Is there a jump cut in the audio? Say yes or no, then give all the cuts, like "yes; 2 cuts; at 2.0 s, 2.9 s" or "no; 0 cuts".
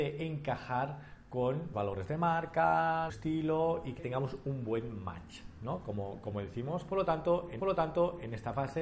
yes; 4 cuts; at 1.7 s, 3.1 s, 4.0 s, 7.6 s